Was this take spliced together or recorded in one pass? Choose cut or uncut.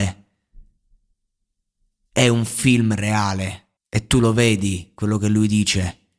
cut